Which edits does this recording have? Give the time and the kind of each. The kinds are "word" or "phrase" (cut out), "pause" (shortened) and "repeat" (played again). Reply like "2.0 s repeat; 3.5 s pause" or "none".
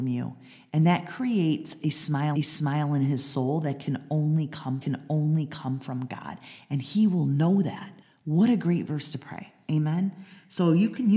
2.4 s repeat; 4.8 s repeat; 8.0 s pause